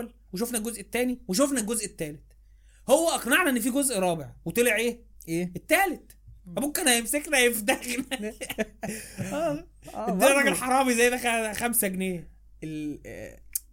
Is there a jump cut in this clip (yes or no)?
no